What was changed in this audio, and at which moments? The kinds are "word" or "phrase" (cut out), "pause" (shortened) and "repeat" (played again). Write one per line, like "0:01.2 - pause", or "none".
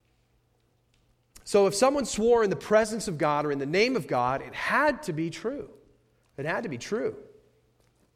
none